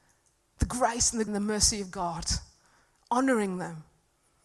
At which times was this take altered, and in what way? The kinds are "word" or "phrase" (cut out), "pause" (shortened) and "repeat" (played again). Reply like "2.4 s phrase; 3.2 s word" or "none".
1.3 s word